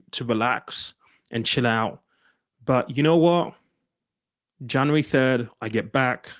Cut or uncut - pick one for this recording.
uncut